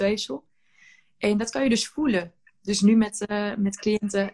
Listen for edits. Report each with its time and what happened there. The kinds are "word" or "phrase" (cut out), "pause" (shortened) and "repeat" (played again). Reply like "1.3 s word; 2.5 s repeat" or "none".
none